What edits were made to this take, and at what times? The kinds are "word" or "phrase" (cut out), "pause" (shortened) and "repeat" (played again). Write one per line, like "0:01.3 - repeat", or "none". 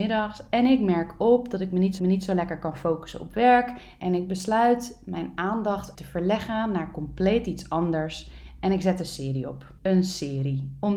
0:02.0 - repeat
0:05.9 - word
0:09.8 - pause